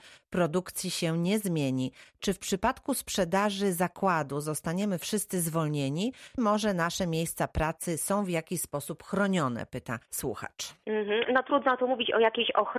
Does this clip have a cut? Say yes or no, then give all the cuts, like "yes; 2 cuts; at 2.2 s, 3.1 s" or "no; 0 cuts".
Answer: yes; 2 cuts; at 6.4 s, 10.1 s